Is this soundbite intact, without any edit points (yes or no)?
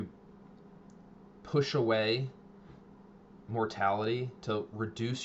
yes